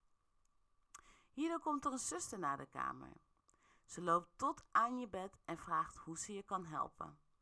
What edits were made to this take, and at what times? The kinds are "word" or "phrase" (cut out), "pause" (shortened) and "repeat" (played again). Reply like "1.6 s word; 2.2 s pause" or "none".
none

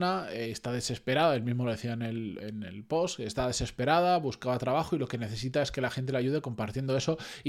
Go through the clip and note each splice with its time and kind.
none

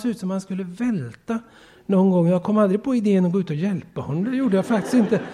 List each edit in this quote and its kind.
none

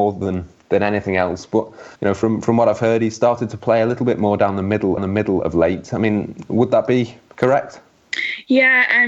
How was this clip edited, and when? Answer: 2.0 s pause; 5.0 s repeat

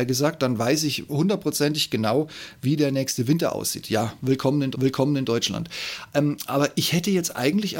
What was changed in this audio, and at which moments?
4.7 s repeat

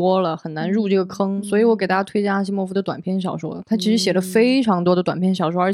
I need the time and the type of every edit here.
1.4 s word

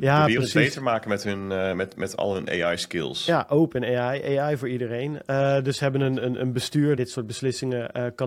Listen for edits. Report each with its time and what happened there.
7.0 s phrase

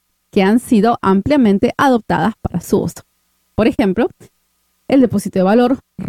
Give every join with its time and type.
none

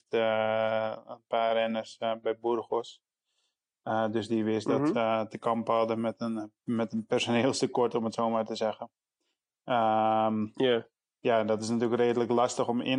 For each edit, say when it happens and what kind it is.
none

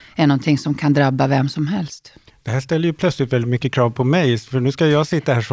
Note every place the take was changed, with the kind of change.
none

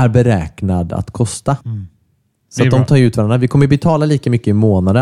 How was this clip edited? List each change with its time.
1.6 s pause

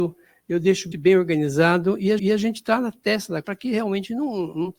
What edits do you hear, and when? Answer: 0.9 s word; 2.2 s repeat; 3.4 s word

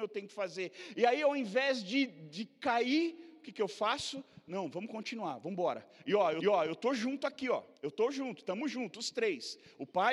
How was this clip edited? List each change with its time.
6.4 s repeat; 7.7 s pause

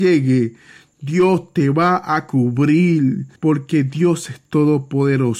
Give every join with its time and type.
3.4 s pause

